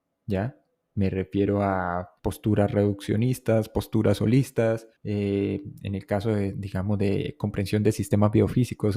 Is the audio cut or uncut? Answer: cut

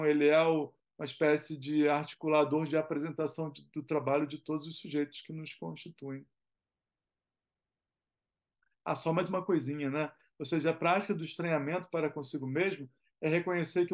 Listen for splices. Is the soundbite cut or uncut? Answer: uncut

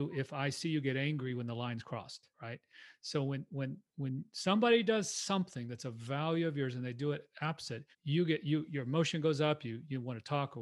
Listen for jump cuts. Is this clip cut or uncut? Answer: cut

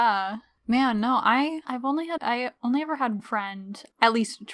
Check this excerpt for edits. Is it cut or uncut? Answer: cut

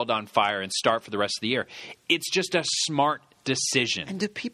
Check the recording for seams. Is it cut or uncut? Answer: uncut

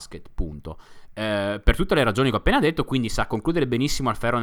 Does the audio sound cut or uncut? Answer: uncut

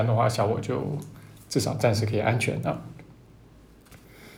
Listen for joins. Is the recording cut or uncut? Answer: uncut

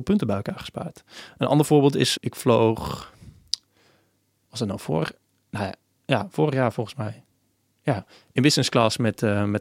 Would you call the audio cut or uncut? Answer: cut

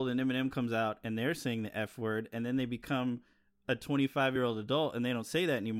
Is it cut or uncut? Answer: uncut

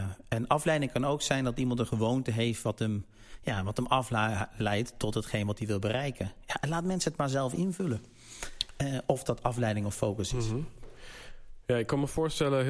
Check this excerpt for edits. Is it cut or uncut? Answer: uncut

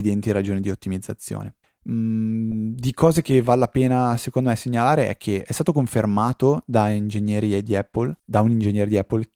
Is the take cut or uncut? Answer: cut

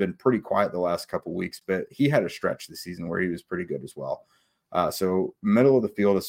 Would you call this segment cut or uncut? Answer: uncut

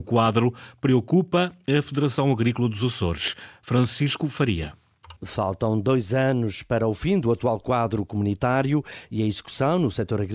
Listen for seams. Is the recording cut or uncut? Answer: cut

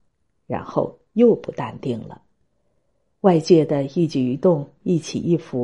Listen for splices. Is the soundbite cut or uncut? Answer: uncut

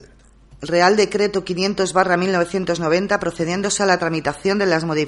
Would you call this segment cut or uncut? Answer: uncut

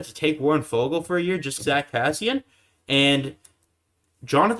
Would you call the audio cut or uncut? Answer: cut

